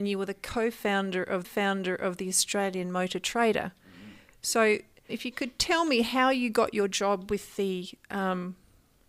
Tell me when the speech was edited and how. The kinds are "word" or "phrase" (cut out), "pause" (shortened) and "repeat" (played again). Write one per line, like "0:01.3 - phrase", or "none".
0:01.4 - repeat
0:05.1 - word